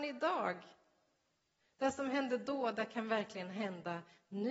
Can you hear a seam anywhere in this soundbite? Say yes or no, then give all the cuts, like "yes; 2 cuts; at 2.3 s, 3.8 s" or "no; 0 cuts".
no; 0 cuts